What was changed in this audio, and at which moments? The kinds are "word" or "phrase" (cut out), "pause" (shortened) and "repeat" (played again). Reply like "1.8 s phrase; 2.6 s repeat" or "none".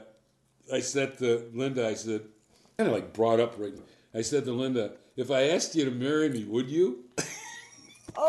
2.8 s phrase; 3.8 s word